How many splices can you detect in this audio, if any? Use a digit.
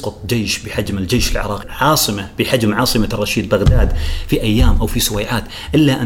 1